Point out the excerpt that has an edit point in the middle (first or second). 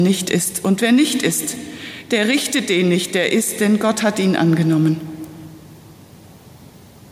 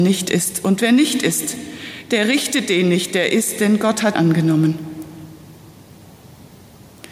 second